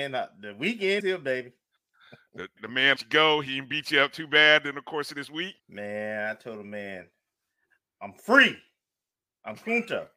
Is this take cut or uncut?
cut